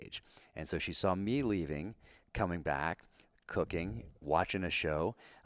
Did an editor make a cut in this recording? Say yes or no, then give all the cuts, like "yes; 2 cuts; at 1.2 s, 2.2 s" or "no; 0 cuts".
no; 0 cuts